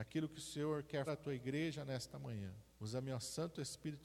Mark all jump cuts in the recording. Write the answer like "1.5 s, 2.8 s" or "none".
1.1 s, 2.7 s

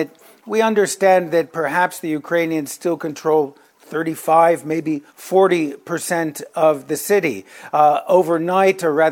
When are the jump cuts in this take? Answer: 5.1 s

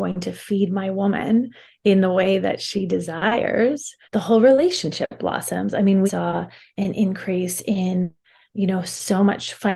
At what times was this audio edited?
4.0 s, 6.1 s

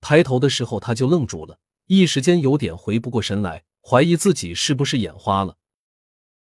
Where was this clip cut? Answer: 1.7 s, 3.7 s

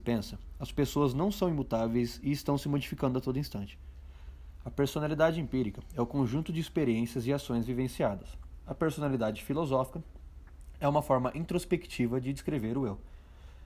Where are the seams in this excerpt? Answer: none

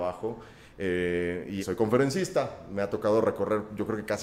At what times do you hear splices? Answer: 1.6 s

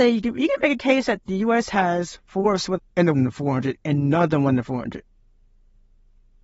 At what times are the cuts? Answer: 2.8 s, 3.1 s

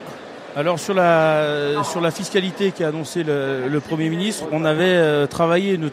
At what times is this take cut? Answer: none

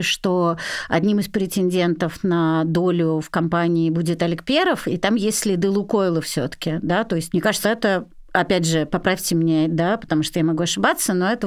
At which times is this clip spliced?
7.6 s

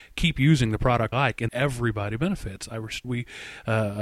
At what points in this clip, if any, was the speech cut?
1.1 s, 1.5 s, 3.0 s

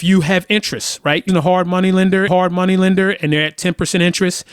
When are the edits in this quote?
1.3 s, 2.3 s

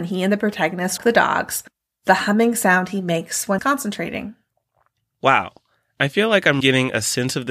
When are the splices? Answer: 1.0 s, 3.6 s, 6.6 s

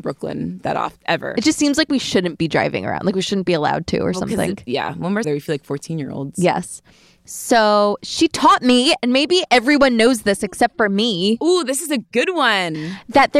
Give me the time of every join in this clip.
5.2 s

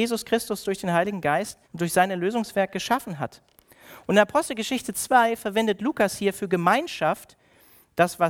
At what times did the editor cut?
1.6 s

